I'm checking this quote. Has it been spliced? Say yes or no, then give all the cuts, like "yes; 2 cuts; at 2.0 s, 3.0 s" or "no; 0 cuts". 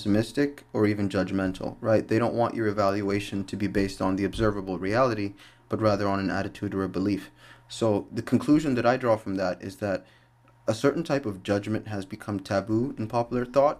no; 0 cuts